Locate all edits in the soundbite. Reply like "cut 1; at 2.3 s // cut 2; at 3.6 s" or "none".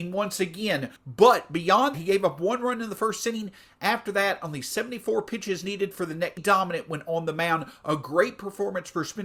cut 1; at 1.0 s // cut 2; at 1.9 s // cut 3; at 6.4 s